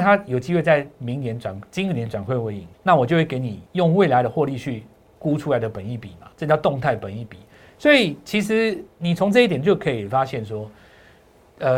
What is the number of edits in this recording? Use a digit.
3